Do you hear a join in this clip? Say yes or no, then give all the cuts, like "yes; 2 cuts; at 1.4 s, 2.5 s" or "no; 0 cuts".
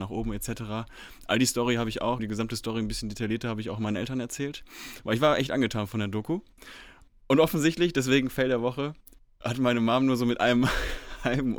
yes; 1 cut; at 2.2 s